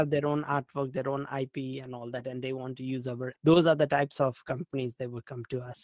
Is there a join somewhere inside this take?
yes; 1 cut; at 3.3 s

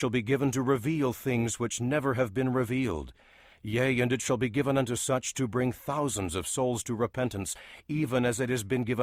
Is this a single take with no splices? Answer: yes; 0 cuts

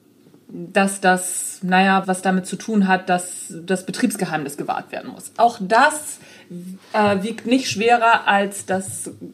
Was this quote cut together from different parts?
yes; 1 cut; at 2.0 s

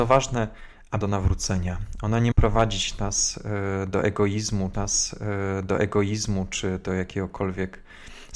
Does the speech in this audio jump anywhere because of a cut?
yes; 3 cuts; at 1.0 s, 2.3 s, 4.7 s

